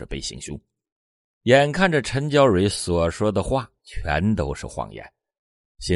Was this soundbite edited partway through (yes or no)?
yes